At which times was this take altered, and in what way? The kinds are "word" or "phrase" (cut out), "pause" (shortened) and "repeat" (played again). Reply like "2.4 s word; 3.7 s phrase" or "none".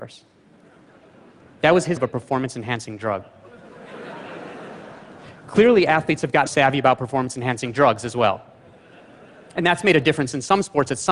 2.0 s word; 6.5 s word